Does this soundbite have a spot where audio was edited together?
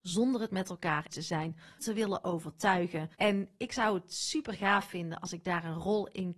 yes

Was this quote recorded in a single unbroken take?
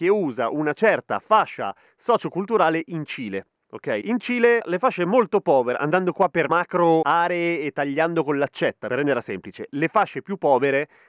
yes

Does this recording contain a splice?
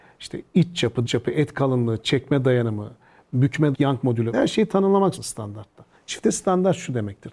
yes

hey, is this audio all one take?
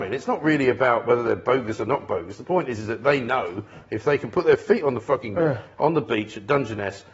no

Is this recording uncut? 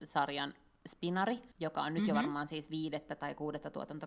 no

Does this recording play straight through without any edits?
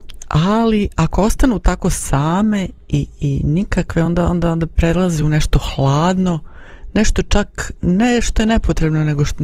yes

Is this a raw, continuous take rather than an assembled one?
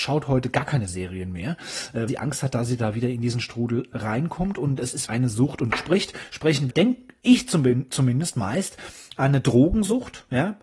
no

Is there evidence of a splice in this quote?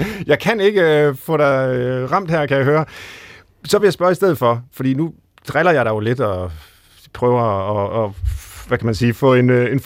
no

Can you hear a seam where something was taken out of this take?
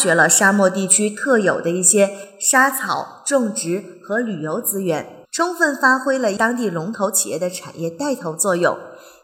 yes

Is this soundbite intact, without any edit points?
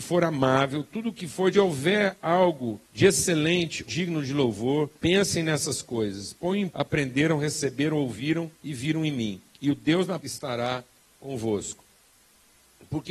no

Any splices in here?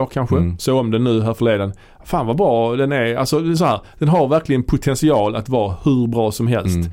no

